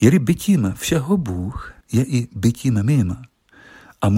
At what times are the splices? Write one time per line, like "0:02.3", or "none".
0:01.8